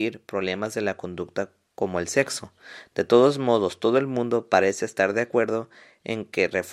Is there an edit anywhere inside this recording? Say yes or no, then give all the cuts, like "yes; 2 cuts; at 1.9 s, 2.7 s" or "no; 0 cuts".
no; 0 cuts